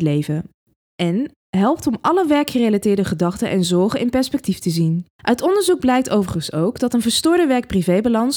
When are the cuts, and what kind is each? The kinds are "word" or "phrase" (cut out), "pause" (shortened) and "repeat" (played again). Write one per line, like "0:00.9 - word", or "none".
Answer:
0:05.1 - pause

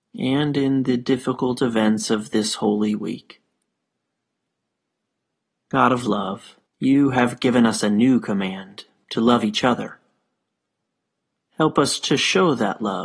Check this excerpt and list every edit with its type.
0:06.7 - pause

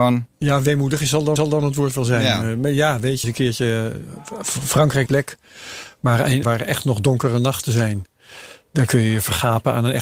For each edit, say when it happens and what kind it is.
0:01.4 - repeat
0:03.2 - phrase
0:05.1 - phrase
0:06.4 - phrase

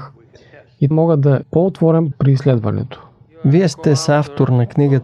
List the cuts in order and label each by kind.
0:00.9 - word
0:01.4 - word
0:02.1 - word

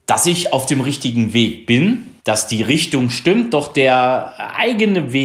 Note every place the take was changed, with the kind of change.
0:02.2 - pause

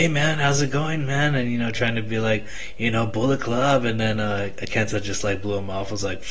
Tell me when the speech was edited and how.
none

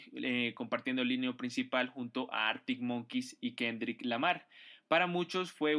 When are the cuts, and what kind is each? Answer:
none

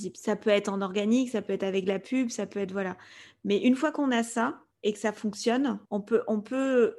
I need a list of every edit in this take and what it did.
0:04.7 - pause
0:05.8 - pause

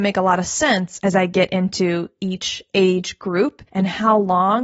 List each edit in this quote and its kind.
0:03.7 - pause

